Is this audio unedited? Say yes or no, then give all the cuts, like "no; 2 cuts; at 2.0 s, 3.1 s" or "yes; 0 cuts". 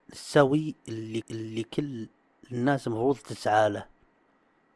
no; 1 cut; at 1.2 s